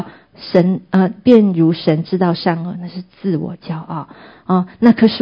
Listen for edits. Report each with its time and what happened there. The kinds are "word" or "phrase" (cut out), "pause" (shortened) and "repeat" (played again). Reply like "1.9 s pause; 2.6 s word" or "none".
none